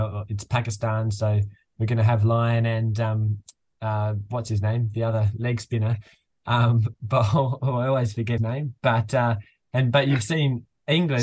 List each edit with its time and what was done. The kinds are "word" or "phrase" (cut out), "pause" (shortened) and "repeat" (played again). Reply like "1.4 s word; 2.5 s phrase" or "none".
8.4 s word